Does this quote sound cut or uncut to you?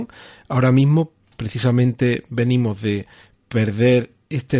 uncut